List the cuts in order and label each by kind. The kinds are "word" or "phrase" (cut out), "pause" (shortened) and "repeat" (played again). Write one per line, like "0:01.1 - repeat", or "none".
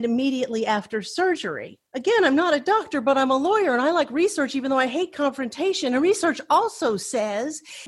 0:01.9 - pause